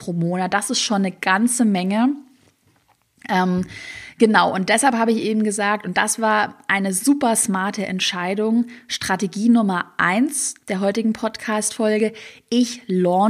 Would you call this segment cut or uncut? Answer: uncut